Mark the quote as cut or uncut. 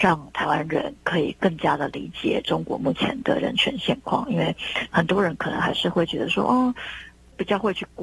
uncut